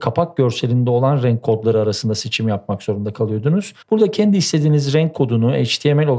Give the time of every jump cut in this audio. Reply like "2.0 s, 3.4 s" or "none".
3.8 s